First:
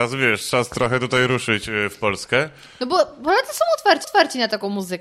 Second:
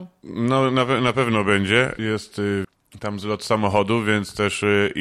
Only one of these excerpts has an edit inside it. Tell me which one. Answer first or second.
first